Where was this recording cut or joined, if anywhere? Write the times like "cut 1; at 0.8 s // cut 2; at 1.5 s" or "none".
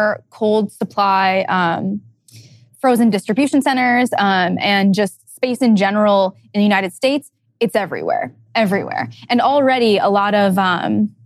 none